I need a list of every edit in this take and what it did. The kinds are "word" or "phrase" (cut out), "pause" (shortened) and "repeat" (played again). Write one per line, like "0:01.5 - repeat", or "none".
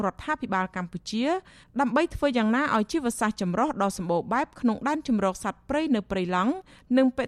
none